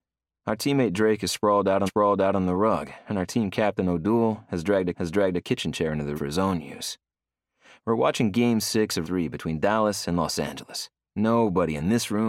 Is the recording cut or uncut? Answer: cut